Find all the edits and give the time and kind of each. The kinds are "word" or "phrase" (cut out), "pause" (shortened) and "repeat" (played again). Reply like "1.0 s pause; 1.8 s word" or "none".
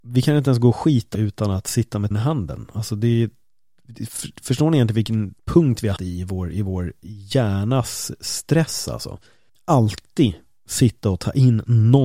1.1 s word; 2.1 s word; 5.4 s pause; 6.0 s word; 9.5 s pause